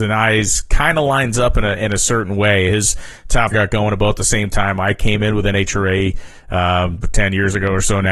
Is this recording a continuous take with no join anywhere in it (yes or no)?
no